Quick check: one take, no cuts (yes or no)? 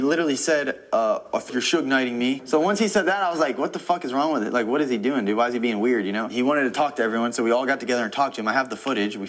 no